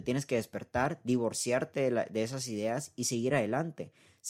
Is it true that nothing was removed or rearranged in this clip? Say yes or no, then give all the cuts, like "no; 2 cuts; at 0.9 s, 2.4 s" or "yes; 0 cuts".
yes; 0 cuts